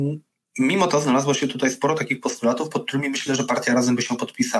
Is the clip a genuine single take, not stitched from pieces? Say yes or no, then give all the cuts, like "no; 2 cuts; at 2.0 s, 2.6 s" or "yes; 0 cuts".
yes; 0 cuts